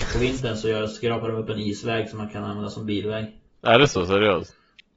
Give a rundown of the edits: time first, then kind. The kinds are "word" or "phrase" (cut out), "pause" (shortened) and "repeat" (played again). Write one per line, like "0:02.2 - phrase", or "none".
none